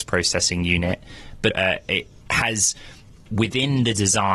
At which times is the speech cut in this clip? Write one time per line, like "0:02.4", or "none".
0:01.5
0:02.2

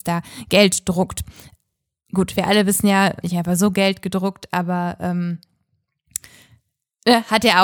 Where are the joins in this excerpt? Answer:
0:03.2

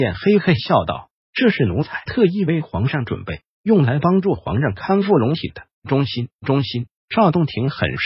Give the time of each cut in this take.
0:05.7
0:06.4
0:07.0

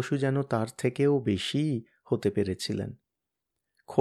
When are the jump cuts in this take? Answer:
none

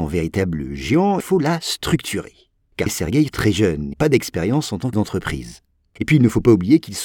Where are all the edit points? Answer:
0:01.2
0:02.9
0:03.3
0:03.9
0:04.9

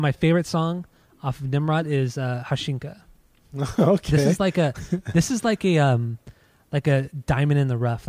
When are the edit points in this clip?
none

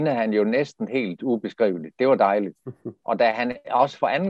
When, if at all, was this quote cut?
none

